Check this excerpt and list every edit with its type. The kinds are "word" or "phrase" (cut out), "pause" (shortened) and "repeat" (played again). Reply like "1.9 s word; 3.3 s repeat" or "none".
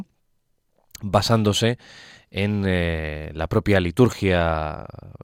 none